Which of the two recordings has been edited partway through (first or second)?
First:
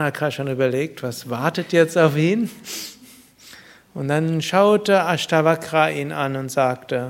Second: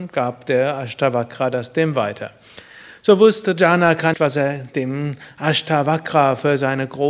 second